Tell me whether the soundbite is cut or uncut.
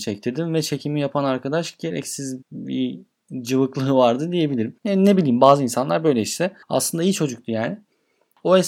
cut